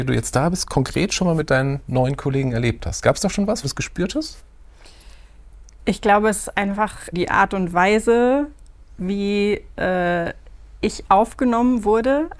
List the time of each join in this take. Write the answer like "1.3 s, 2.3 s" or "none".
3.6 s, 5.7 s, 7.1 s